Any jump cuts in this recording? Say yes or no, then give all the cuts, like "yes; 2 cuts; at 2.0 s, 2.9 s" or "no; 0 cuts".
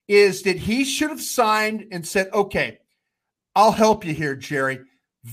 no; 0 cuts